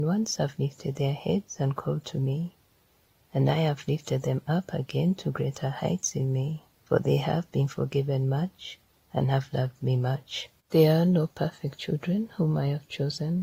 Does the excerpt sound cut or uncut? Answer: cut